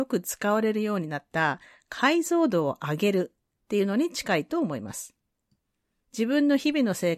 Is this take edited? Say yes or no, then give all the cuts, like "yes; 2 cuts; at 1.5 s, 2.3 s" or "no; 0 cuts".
no; 0 cuts